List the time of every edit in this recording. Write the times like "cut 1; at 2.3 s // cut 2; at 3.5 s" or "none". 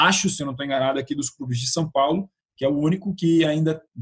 none